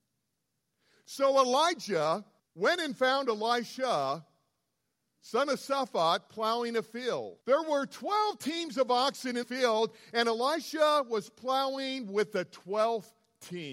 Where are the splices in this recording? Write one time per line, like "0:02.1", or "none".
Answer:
0:02.4
0:07.4
0:09.4